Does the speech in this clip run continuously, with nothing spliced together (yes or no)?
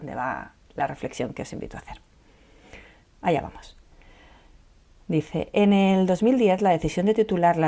yes